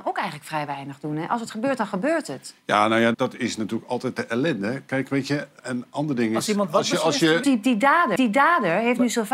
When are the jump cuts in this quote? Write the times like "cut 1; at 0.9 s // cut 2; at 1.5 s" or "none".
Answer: cut 1; at 3.1 s // cut 2; at 5.6 s // cut 3; at 7.4 s // cut 4; at 8.2 s

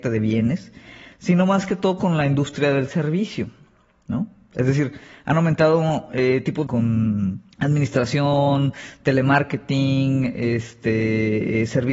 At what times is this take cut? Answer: cut 1; at 6.7 s // cut 2; at 7.5 s

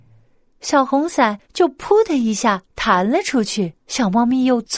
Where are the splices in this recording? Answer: cut 1; at 1.4 s // cut 2; at 3.8 s

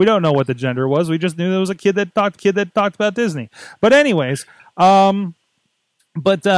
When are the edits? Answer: cut 1; at 2.4 s

